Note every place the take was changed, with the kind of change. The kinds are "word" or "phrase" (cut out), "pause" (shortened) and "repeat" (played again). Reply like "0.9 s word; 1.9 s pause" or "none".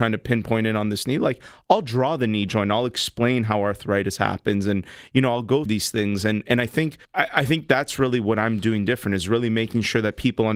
5.7 s word; 7.0 s pause